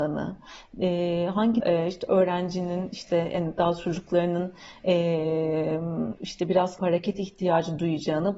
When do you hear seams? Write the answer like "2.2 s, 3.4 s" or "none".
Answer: 1.6 s, 6.2 s, 6.8 s